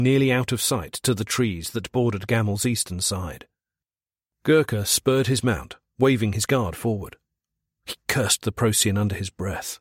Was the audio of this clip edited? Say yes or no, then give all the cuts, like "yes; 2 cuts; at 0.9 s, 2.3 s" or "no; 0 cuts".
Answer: no; 0 cuts